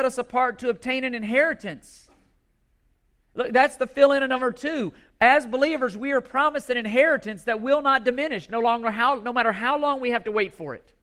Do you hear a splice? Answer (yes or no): no